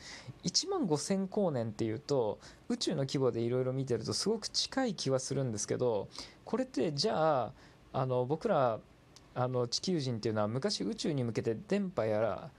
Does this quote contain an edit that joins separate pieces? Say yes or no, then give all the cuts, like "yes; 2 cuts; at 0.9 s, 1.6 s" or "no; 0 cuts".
no; 0 cuts